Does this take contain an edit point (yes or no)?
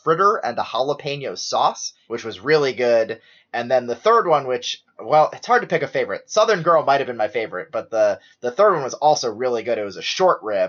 no